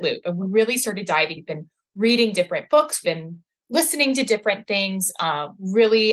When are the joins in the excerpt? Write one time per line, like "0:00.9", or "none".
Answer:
0:01.3
0:03.0